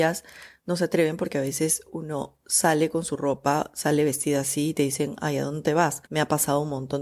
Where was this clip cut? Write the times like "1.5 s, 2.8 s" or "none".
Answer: 6.1 s